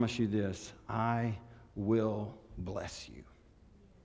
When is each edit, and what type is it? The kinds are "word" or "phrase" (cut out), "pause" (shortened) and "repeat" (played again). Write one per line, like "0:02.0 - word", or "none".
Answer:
none